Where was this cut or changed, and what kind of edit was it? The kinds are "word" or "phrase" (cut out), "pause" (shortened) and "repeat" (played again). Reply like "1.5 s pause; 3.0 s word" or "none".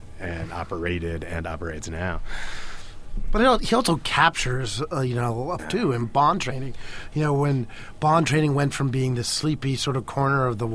5.6 s phrase